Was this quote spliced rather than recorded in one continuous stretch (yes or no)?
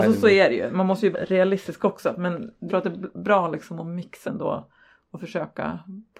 yes